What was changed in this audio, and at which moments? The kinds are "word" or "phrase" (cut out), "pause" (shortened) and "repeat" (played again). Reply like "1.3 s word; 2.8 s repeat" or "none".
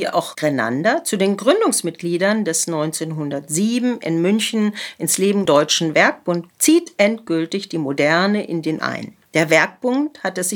5.5 s word; 6.5 s word; 8.8 s word; 9.3 s pause